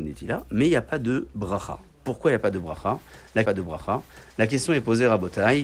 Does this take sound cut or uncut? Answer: cut